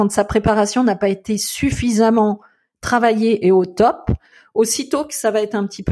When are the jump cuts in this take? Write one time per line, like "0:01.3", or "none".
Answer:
none